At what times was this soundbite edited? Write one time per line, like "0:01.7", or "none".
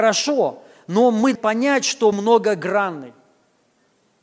0:01.4
0:02.1